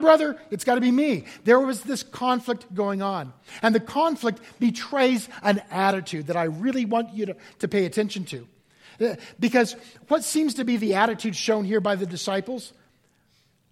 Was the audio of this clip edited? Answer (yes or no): no